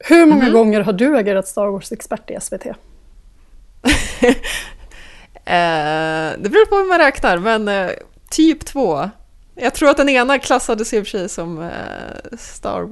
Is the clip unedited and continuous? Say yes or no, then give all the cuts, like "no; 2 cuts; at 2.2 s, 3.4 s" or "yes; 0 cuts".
yes; 0 cuts